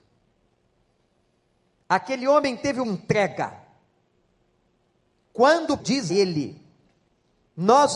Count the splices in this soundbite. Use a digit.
3